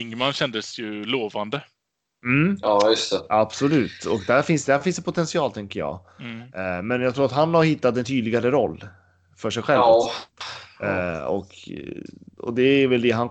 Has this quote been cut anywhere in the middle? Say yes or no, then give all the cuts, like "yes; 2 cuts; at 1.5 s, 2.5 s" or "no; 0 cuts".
no; 0 cuts